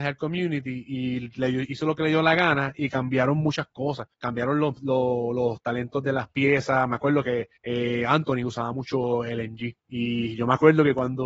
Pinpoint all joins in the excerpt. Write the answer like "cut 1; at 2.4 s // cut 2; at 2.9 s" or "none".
cut 1; at 4.1 s // cut 2; at 7.6 s // cut 3; at 9.8 s